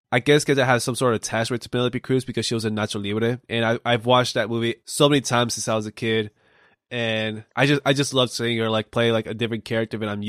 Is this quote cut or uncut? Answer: cut